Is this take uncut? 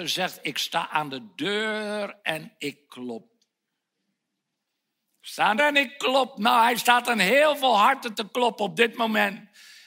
no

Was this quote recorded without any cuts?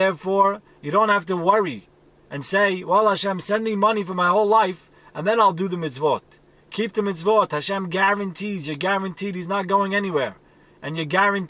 yes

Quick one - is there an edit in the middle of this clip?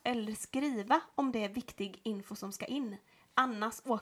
no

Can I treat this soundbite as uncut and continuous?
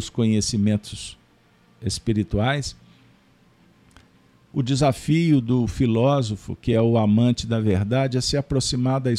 yes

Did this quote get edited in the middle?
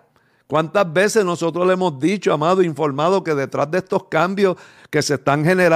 no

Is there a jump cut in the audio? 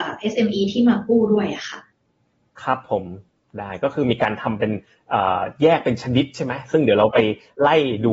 no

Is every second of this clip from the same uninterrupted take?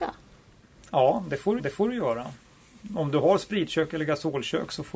no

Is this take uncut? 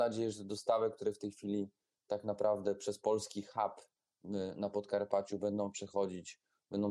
yes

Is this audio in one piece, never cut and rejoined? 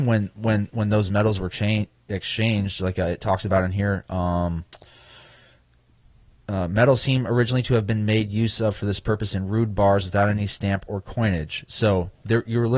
yes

